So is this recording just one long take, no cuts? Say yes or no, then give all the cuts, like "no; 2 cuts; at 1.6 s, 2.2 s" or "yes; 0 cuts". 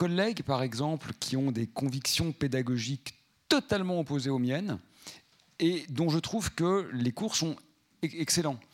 yes; 0 cuts